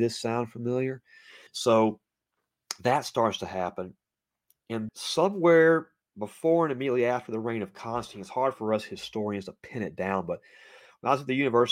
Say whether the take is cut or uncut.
cut